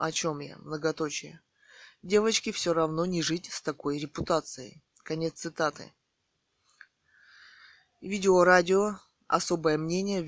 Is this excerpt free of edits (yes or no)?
yes